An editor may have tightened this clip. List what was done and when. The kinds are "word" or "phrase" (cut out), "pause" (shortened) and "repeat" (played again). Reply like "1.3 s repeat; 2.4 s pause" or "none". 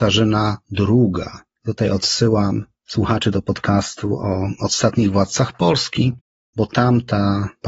none